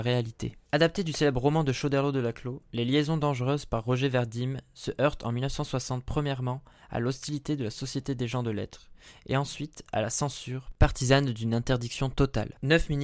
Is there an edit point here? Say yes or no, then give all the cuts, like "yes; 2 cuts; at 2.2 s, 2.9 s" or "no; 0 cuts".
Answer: no; 0 cuts